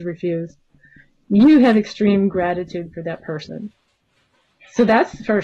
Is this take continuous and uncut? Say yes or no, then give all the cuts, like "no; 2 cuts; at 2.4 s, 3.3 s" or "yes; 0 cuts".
yes; 0 cuts